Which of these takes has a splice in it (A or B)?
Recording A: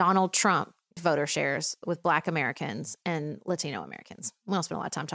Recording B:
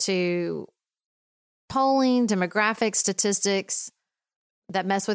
A